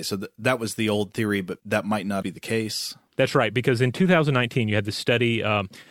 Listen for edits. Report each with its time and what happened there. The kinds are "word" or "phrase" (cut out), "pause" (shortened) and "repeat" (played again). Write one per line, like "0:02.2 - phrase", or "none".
0:01.6 - word
0:02.2 - word